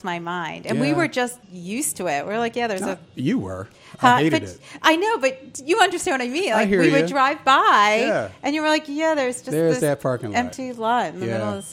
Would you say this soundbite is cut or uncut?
cut